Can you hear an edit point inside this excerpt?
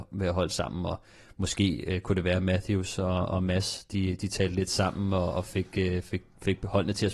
no; 0 cuts

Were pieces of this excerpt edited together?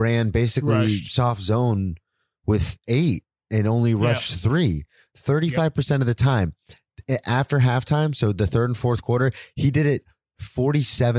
no; 0 cuts

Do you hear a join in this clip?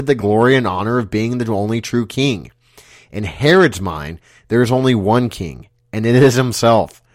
no; 0 cuts

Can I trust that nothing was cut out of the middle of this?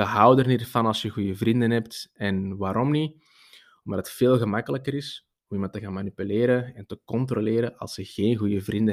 yes; 0 cuts

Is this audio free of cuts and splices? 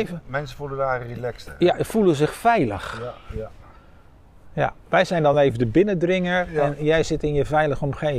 yes; 0 cuts

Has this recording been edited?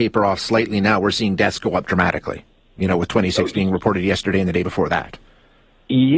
no; 0 cuts

